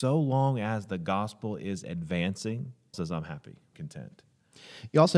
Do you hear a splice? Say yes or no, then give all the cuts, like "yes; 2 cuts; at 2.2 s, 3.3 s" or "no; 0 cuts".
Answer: yes; 2 cuts; at 2.9 s, 3.7 s